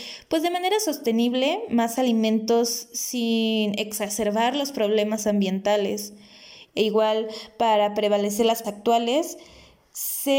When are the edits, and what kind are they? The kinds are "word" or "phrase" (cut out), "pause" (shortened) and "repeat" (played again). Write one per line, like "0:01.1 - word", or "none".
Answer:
0:08.6 - word